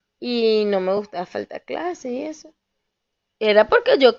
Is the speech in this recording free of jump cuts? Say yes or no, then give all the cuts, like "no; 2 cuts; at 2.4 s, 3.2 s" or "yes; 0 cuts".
yes; 0 cuts